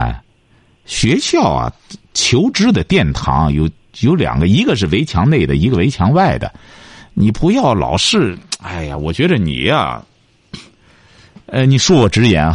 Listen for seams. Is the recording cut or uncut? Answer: uncut